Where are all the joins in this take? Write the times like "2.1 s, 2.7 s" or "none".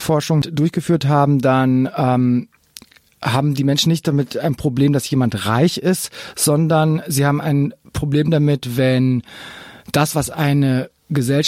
none